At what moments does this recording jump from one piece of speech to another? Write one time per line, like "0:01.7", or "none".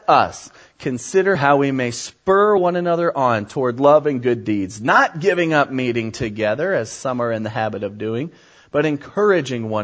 none